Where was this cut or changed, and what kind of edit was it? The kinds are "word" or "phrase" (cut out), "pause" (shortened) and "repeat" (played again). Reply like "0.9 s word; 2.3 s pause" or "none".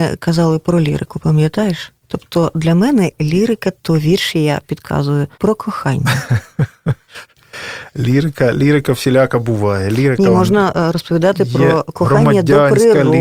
2.0 s pause; 5.3 s pause